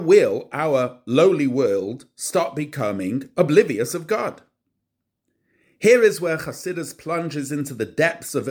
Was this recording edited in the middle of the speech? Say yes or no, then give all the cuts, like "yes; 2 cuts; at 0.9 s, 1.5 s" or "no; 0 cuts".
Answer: no; 0 cuts